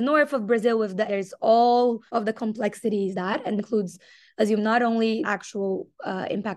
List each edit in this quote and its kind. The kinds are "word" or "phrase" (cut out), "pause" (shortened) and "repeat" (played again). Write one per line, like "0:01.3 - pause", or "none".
0:01.1 - word
0:02.1 - pause
0:03.1 - phrase
0:03.6 - word
0:04.6 - word
0:05.2 - word

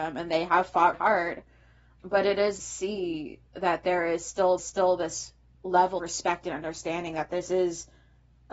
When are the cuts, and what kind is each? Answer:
0:00.9 - word
0:02.6 - phrase
0:03.5 - pause
0:04.6 - repeat
0:06.0 - word

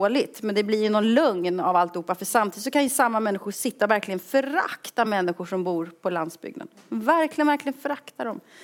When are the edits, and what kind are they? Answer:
none

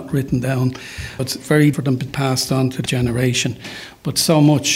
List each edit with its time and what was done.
0:01.2 - word
0:01.7 - word
0:02.1 - word
0:02.9 - word

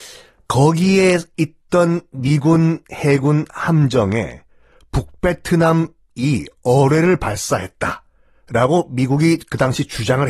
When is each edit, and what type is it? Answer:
none

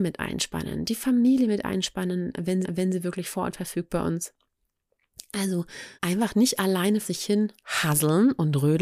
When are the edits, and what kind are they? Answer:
0:02.6 - repeat
0:06.0 - pause
0:07.0 - word

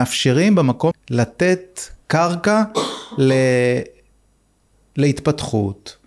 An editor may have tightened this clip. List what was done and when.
0:00.9 - word

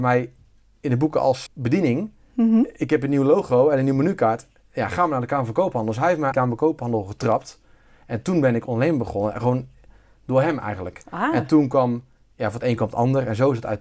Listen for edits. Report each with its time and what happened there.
0:01.5 - word
0:06.3 - phrase

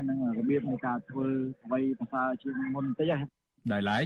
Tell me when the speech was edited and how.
none

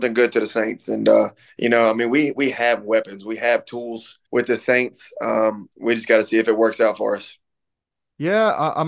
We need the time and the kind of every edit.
0:01.5 - pause
0:04.3 - pause
0:05.7 - pause

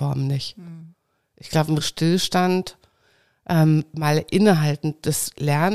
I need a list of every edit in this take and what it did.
0:01.8 - word

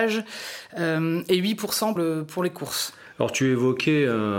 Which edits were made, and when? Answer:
0:02.0 - word

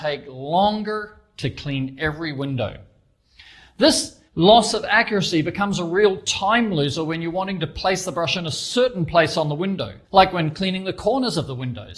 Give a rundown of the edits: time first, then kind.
0:04.3 - pause
0:10.0 - pause

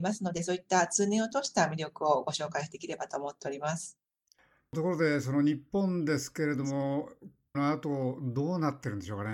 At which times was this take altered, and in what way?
0:07.5 - word

